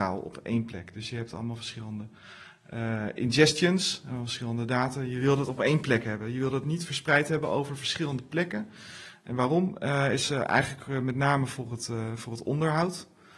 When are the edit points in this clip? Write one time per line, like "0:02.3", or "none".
none